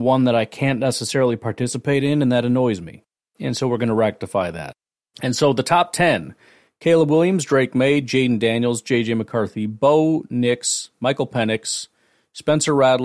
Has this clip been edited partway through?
no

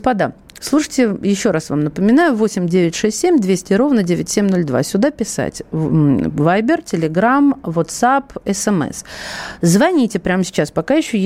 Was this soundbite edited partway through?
no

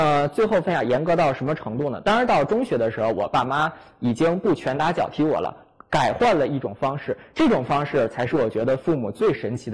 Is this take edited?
no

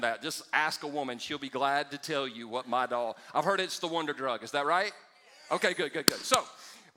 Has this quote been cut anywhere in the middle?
no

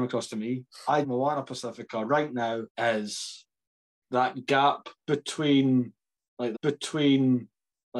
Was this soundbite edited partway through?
yes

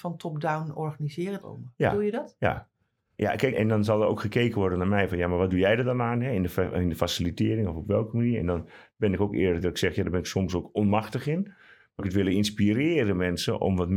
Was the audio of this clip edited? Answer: yes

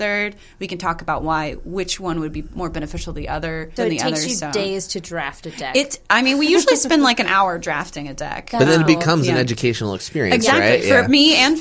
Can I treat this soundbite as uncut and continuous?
no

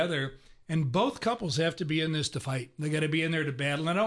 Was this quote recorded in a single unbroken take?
yes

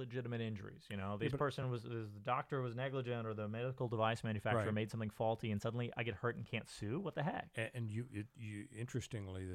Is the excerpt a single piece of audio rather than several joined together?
yes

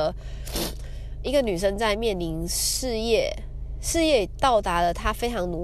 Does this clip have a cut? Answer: yes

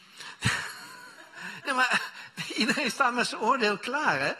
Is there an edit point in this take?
no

